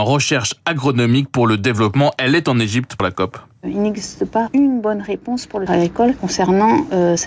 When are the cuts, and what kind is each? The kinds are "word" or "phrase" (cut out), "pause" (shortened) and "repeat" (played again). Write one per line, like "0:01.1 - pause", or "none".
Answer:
0:05.7 - word